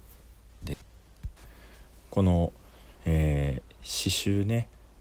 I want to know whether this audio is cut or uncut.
cut